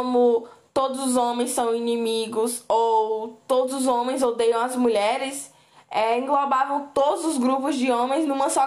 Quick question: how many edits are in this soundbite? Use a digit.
0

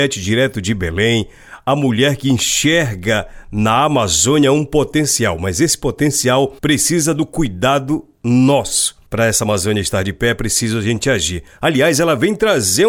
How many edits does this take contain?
2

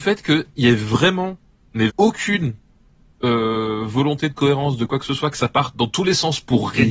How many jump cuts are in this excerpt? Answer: 1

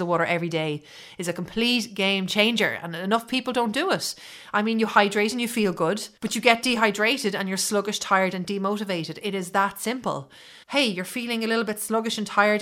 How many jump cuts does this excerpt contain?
2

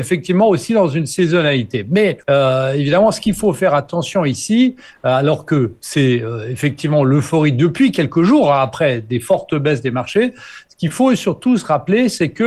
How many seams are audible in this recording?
1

